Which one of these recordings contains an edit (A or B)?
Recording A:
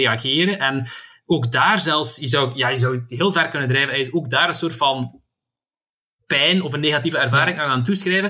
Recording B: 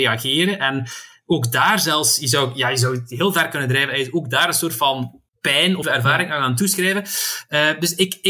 B